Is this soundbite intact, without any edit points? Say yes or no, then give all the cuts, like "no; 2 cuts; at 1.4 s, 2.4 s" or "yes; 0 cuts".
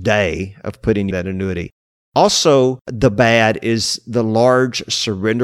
no; 1 cut; at 1.1 s